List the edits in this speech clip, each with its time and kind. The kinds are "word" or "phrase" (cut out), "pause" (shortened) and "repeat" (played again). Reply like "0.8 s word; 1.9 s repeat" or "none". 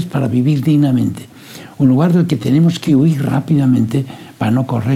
none